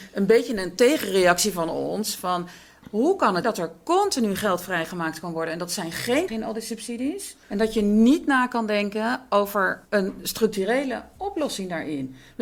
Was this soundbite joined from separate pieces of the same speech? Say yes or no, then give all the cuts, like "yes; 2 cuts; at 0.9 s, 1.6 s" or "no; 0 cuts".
yes; 4 cuts; at 3.4 s, 6.3 s, 7.4 s, 9.8 s